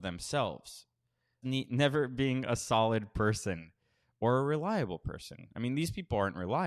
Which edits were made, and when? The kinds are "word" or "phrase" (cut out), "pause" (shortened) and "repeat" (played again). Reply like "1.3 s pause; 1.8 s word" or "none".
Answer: 1.4 s word